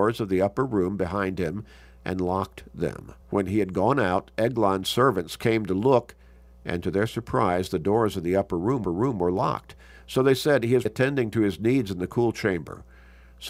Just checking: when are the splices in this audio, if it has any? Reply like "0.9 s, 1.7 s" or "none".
3.2 s, 8.8 s, 10.9 s